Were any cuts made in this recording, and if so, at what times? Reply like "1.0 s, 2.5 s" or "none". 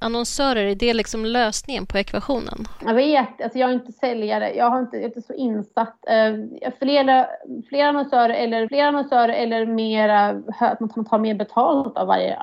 8.7 s, 10.9 s

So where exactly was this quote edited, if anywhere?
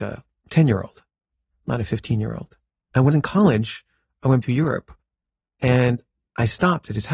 2.8 s, 3.1 s, 4.4 s

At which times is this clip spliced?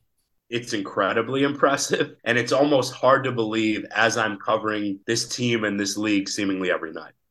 2.2 s, 5.0 s

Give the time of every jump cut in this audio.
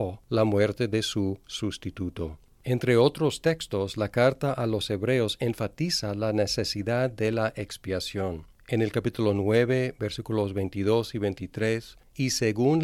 none

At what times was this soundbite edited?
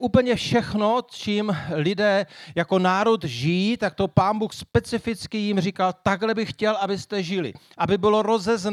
none

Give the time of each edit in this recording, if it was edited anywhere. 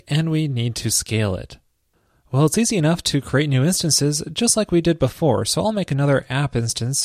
none

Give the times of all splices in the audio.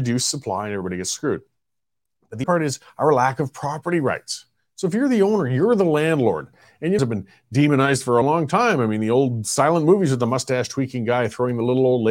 2.4 s, 7.0 s, 8.2 s

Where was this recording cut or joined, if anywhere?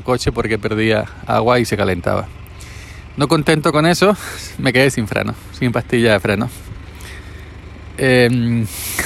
3.7 s

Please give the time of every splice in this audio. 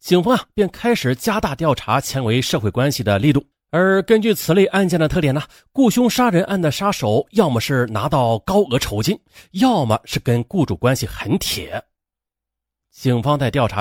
3.5 s

